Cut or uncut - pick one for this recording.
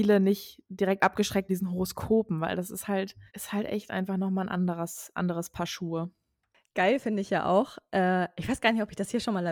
cut